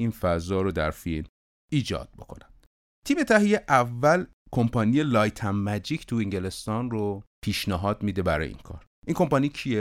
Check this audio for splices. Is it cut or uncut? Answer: uncut